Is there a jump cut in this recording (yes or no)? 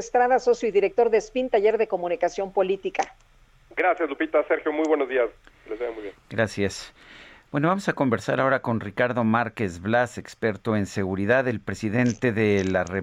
no